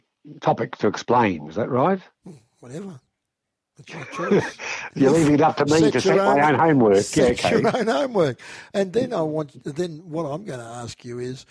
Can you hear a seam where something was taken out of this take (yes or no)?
no